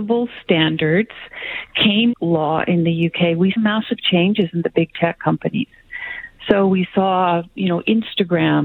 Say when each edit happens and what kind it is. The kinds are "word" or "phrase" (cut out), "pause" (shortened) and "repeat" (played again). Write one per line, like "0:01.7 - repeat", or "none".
0:02.1 - word
0:03.6 - word